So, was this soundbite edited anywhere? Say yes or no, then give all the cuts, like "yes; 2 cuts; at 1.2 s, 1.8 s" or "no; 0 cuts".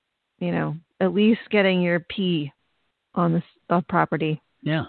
no; 0 cuts